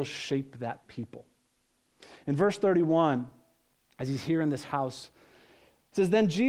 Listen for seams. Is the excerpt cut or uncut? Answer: uncut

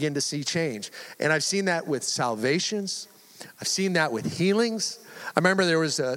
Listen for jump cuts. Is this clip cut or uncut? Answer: uncut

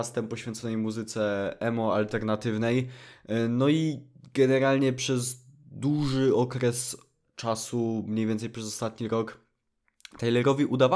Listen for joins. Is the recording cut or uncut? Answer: uncut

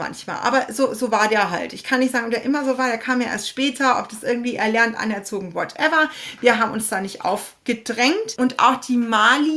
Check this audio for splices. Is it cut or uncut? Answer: uncut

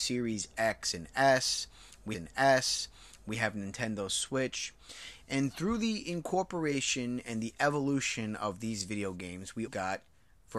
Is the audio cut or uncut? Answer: cut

